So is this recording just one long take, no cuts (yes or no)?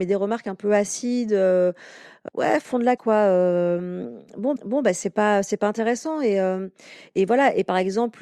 no